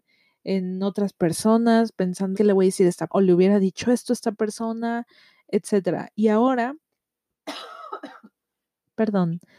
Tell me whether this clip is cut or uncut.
cut